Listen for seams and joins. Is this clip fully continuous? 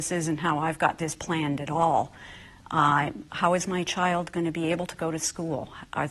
no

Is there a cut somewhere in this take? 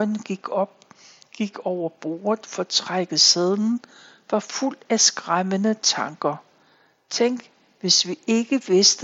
no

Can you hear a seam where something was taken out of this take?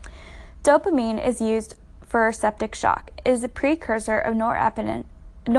no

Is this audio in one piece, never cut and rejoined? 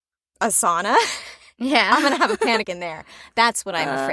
no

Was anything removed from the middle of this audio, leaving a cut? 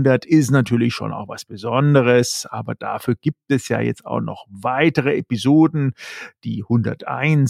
no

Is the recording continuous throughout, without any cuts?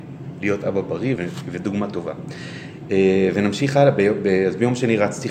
no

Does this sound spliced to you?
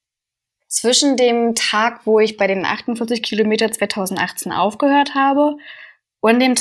no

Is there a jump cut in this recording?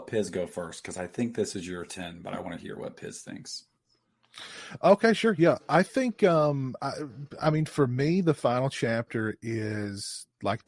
no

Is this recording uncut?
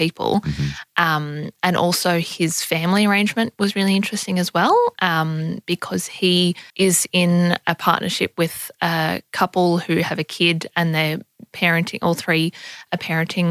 no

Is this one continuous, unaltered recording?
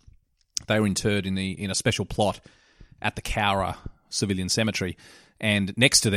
yes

